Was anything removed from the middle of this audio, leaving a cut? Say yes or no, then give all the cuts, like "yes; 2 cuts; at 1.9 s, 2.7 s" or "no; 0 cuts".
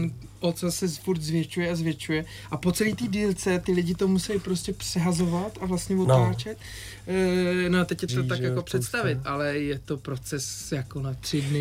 yes; 1 cut; at 8.1 s